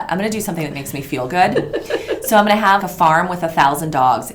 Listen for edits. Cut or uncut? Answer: cut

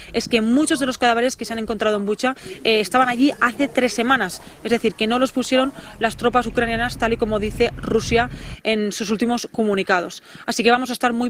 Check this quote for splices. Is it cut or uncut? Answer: uncut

